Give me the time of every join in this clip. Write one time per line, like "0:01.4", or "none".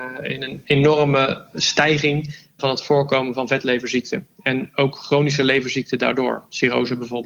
0:02.6